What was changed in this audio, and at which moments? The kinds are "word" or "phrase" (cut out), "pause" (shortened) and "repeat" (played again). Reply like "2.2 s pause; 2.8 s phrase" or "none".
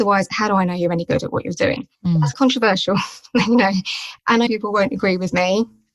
1.9 s pause; 2.3 s word; 4.5 s phrase